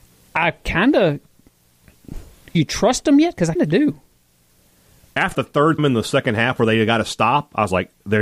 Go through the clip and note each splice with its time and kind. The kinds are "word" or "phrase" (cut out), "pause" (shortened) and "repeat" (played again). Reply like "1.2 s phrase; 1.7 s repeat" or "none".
2.5 s word; 3.6 s word; 5.3 s word; 5.8 s word